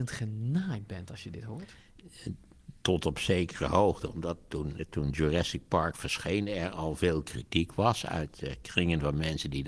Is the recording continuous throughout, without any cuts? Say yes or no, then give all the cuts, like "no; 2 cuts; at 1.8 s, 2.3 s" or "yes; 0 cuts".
yes; 0 cuts